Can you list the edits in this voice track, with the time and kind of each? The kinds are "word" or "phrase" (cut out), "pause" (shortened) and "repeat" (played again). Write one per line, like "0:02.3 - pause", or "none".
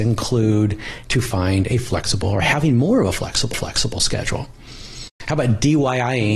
0:01.0 - word
0:02.2 - word
0:03.5 - repeat